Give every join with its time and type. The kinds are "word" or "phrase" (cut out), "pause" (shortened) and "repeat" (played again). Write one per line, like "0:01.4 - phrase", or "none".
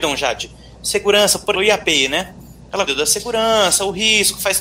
0:01.5 - word
0:02.9 - word